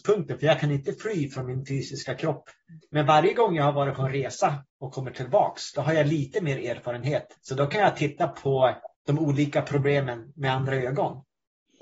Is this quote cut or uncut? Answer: cut